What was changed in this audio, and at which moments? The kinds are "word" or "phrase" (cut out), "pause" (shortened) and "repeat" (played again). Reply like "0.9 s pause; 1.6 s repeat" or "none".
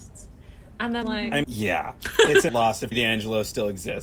1.0 s word; 1.4 s word; 2.5 s word; 2.9 s word